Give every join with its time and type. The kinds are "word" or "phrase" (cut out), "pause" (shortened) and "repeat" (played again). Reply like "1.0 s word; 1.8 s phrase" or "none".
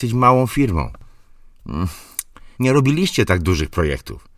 2.5 s pause